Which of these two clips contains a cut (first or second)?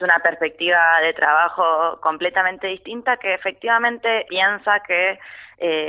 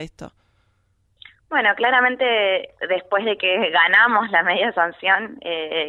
first